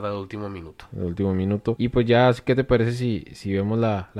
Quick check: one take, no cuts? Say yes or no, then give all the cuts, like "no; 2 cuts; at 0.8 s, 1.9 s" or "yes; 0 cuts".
yes; 0 cuts